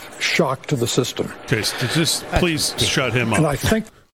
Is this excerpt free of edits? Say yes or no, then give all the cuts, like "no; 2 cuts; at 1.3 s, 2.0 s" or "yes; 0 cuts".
yes; 0 cuts